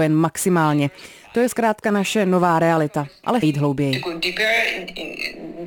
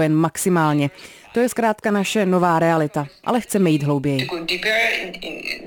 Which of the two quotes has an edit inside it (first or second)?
first